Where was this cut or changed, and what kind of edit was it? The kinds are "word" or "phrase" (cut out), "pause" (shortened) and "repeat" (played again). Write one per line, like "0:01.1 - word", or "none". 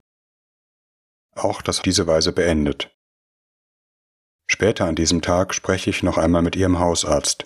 0:01.8 - phrase

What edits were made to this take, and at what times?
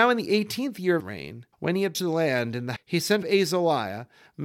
0:01.0 - word
0:01.5 - pause
0:01.9 - word
0:02.8 - word
0:03.2 - phrase

